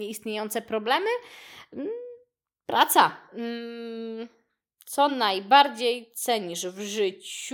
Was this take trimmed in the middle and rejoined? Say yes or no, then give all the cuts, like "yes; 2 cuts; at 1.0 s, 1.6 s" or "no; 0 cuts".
no; 0 cuts